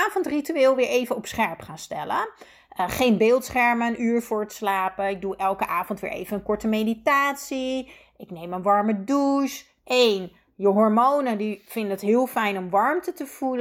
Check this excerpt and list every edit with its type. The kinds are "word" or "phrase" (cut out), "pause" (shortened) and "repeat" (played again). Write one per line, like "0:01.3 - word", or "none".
none